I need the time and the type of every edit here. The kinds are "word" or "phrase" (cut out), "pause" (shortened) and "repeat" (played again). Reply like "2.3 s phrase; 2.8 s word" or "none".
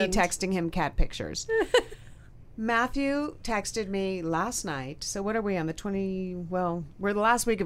none